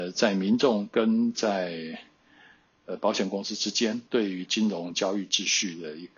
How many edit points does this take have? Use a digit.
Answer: 1